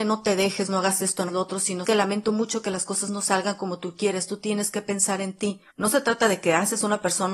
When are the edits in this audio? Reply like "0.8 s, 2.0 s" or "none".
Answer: 1.3 s, 1.8 s, 5.7 s